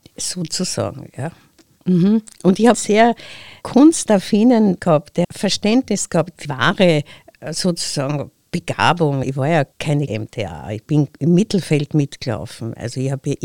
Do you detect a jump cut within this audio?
yes; 6 cuts; at 2.7 s, 4.8 s, 5.2 s, 6.4 s, 9.2 s, 10.1 s

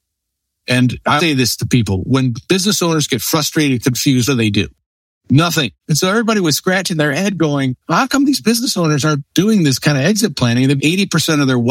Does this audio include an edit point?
yes; 5 cuts; at 1.2 s, 4.3 s, 5.8 s, 7.8 s, 10.8 s

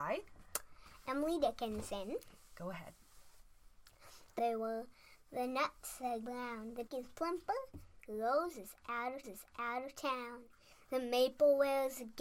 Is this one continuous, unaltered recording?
no; 4 cuts; at 4.4 s, 6.2 s, 6.9 s, 9.2 s

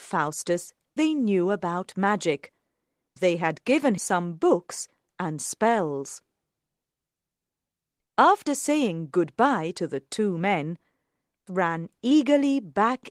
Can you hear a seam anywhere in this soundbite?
yes; 4 cuts; at 1.0 s, 3.2 s, 4.0 s, 11.5 s

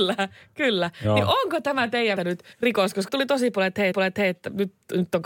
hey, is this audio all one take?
no; 4 cuts; at 2.2 s, 2.5 s, 3.1 s, 3.9 s

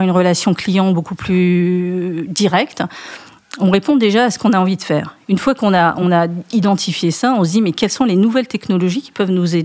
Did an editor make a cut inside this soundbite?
no; 0 cuts

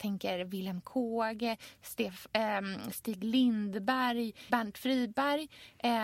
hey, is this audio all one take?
yes; 0 cuts

